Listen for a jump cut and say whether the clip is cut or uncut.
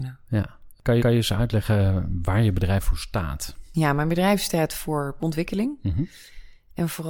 cut